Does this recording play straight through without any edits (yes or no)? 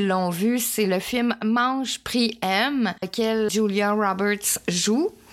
no